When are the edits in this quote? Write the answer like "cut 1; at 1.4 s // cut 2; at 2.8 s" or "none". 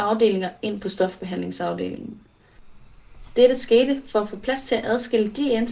none